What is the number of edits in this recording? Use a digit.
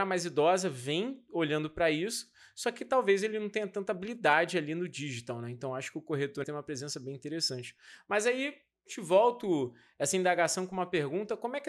1